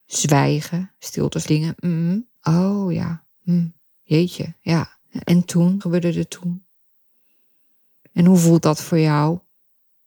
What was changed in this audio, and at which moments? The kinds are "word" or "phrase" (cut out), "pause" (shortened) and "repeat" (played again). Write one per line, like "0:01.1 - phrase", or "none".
0:01.5 - phrase
0:02.3 - pause
0:05.0 - pause
0:05.8 - word